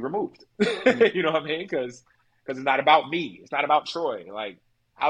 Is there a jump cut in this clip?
no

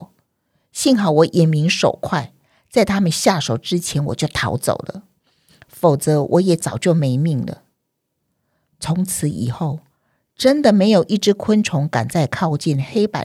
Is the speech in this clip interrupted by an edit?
no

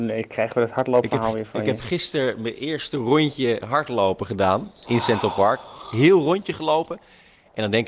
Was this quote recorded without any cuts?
yes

